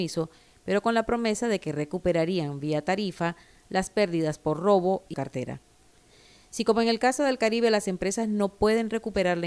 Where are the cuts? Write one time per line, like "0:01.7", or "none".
0:05.1